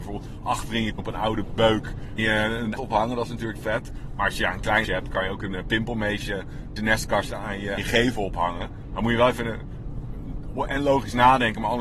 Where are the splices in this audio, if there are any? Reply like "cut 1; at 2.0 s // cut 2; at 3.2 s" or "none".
cut 1; at 1.0 s // cut 2; at 2.2 s // cut 3; at 2.8 s // cut 4; at 3.6 s // cut 5; at 4.8 s // cut 6; at 6.8 s // cut 7; at 7.8 s